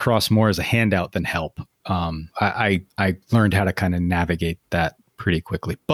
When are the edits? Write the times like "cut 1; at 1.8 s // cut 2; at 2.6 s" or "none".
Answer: cut 1; at 2.3 s // cut 2; at 2.9 s // cut 3; at 3.2 s